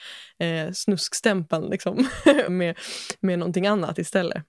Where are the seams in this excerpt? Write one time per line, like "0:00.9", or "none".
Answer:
0:02.5